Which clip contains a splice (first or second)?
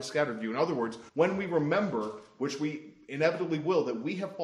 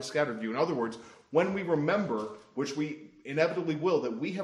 first